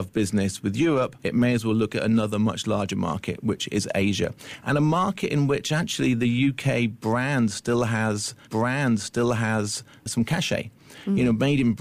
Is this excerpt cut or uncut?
cut